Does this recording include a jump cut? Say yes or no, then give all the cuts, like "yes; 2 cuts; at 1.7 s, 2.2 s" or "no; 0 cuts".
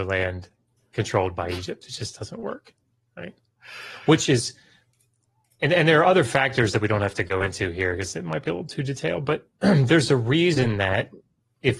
no; 0 cuts